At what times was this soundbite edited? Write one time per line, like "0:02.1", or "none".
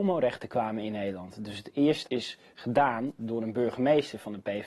0:02.0